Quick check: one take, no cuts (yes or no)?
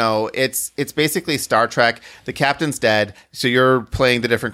yes